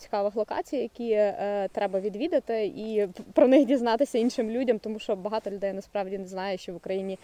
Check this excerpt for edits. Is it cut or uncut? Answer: uncut